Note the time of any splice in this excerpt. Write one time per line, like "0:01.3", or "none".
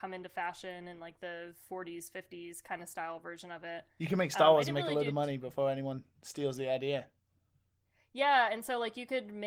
none